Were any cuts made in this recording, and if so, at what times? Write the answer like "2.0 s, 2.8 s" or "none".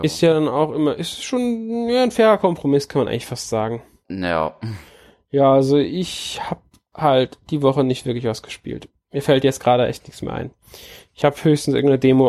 none